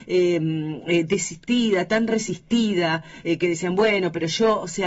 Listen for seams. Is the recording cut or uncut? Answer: uncut